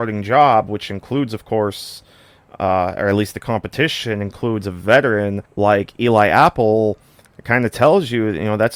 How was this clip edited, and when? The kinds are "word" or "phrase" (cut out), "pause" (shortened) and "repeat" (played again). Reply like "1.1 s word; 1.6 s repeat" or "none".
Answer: 5.5 s pause

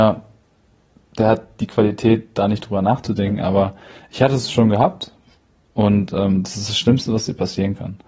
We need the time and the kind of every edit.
none

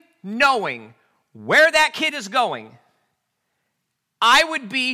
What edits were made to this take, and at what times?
none

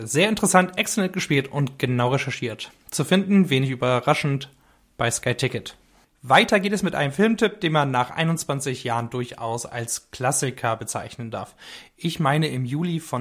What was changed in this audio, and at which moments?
none

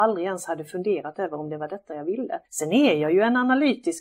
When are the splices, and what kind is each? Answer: 2.4 s pause

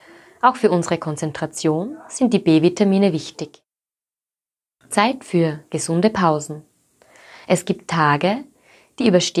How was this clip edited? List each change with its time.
none

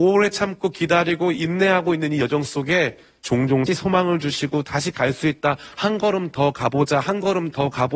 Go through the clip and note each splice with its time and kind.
3.7 s phrase

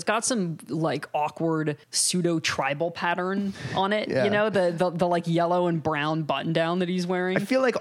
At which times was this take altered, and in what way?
1.8 s pause

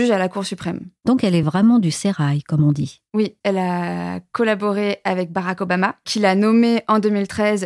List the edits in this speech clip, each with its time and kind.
none

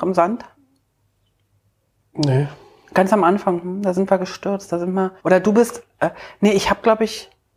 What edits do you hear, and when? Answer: 5.2 s pause

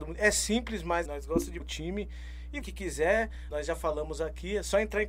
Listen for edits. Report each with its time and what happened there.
1.0 s word; 1.6 s word; 2.6 s word; 3.5 s word

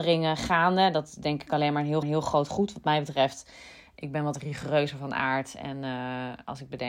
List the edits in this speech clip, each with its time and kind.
2.0 s repeat

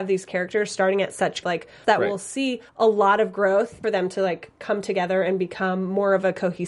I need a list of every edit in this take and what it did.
1.4 s phrase; 1.8 s phrase; 2.7 s pause; 3.8 s phrase

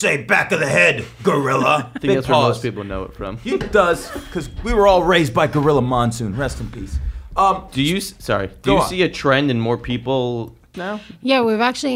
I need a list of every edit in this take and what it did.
3.6 s phrase; 10.7 s phrase

